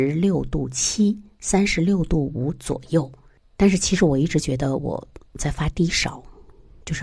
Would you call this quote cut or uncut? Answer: uncut